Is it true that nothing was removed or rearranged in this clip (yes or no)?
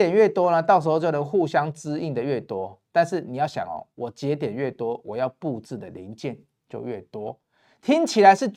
yes